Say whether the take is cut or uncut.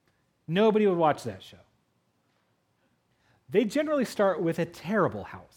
uncut